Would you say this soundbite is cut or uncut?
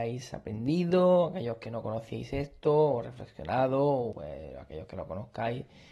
cut